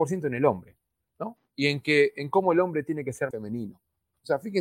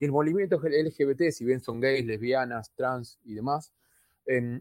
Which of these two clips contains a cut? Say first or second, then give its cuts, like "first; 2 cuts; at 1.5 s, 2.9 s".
first; 2 cuts; at 1.4 s, 3.3 s